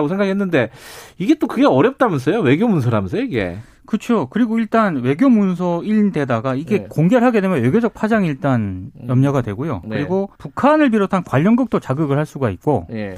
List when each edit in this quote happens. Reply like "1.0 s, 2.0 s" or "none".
10.4 s

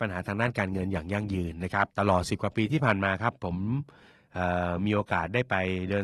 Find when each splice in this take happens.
1.9 s

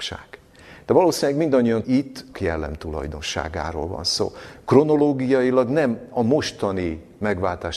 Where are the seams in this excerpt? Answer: 1.8 s, 2.3 s

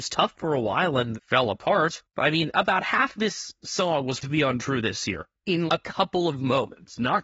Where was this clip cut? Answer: 1.1 s, 2.1 s, 4.2 s, 5.7 s

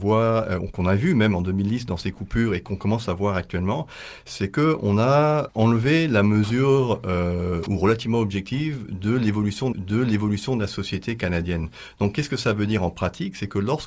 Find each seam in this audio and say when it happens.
5.5 s, 7.7 s, 9.7 s

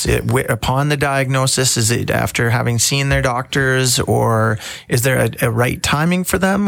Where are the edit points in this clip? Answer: none

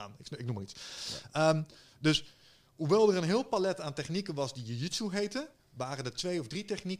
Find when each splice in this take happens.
none

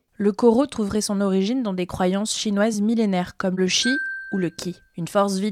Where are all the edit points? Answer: none

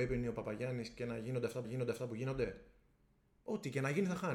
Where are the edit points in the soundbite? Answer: 1.6 s

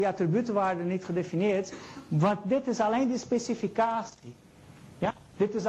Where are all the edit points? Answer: none

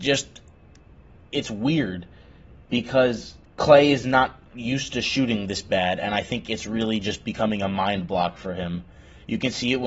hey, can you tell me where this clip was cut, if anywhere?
1.1 s, 3.4 s

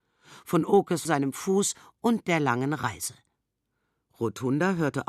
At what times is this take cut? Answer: 1.1 s

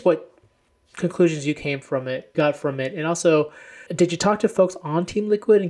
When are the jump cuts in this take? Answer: 2.3 s, 3.9 s

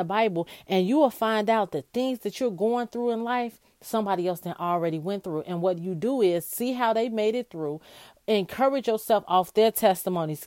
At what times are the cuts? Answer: none

